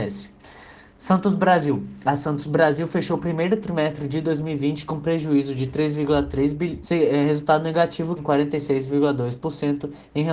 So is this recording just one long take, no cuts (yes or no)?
no